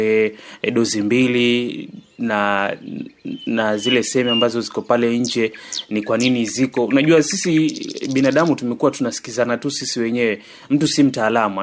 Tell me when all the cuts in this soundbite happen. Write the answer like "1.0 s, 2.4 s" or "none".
none